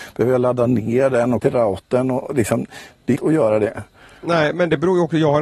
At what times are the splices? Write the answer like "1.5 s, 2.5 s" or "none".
1.4 s, 3.2 s